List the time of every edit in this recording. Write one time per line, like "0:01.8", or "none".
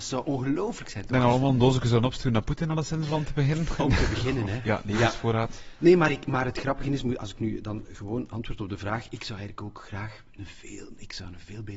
none